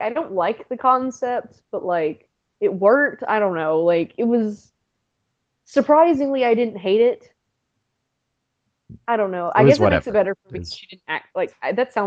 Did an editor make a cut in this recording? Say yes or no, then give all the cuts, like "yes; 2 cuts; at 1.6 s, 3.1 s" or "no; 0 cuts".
no; 0 cuts